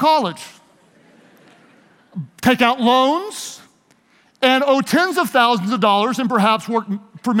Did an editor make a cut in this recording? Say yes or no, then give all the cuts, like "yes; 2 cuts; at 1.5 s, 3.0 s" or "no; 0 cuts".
no; 0 cuts